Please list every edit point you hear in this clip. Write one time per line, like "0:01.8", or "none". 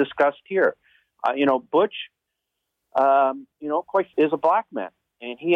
0:03.5
0:04.1